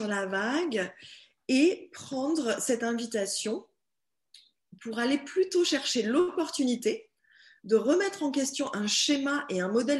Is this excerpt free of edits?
yes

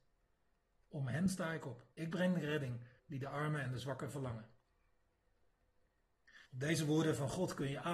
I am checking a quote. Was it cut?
yes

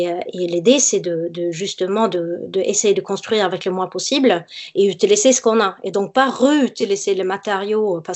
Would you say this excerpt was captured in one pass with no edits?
yes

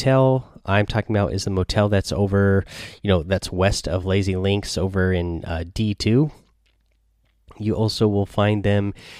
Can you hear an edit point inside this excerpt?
no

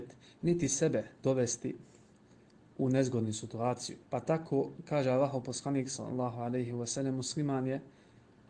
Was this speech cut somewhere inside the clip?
yes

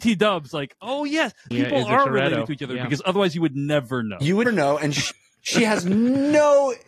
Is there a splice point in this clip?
yes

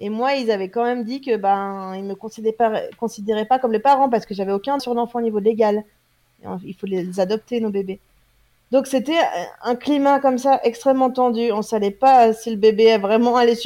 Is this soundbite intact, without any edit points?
no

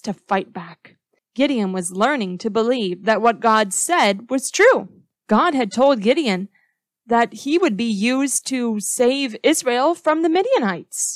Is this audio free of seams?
yes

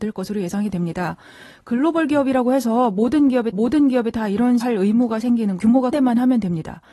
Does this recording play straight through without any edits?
no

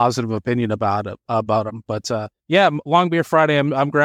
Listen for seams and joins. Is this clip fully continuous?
no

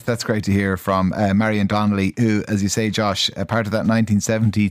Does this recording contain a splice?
no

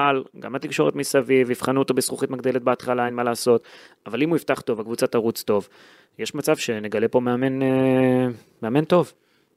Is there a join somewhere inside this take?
no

